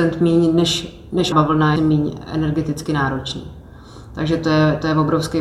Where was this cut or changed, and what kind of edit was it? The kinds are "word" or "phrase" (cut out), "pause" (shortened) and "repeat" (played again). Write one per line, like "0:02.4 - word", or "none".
0:01.3 - word
0:01.8 - phrase